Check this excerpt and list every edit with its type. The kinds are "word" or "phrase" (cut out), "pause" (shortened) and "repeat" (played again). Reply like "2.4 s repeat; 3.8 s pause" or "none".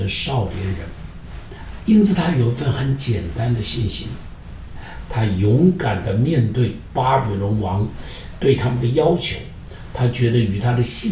1.8 s phrase